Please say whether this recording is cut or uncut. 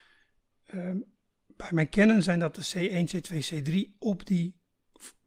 uncut